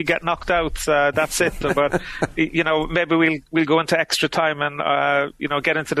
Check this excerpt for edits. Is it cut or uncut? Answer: uncut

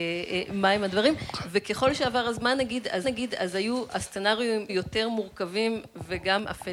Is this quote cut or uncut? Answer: cut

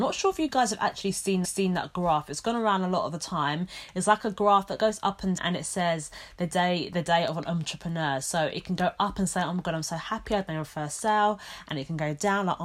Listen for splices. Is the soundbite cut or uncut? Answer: cut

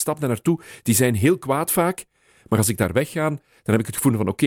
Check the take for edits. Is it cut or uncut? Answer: uncut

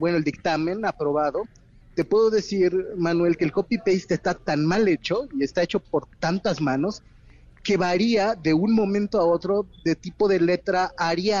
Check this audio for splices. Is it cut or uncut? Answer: uncut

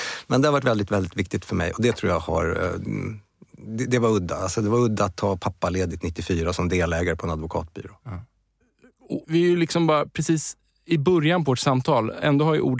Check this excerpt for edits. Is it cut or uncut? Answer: uncut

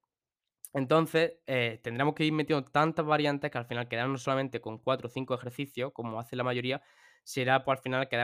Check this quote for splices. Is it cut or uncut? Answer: uncut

